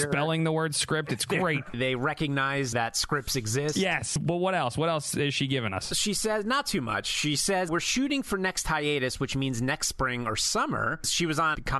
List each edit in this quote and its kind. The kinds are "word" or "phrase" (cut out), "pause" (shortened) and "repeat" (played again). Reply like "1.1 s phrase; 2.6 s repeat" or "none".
7.7 s word